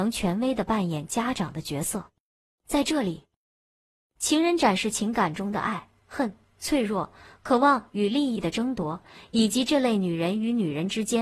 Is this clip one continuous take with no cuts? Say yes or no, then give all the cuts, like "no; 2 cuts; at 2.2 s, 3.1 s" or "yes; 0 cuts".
yes; 0 cuts